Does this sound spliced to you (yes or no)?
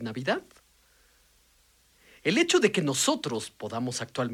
no